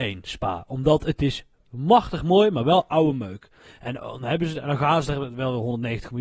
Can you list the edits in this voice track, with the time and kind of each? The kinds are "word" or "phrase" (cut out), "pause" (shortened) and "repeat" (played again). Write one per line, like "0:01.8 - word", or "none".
none